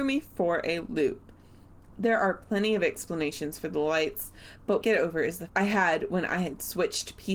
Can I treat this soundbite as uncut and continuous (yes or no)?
no